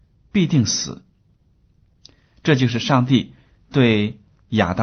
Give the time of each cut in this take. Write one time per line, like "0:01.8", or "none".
none